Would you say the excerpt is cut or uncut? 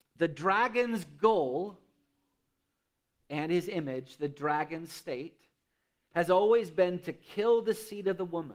uncut